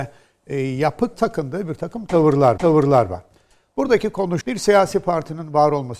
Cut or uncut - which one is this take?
cut